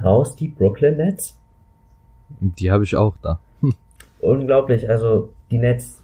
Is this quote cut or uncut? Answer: uncut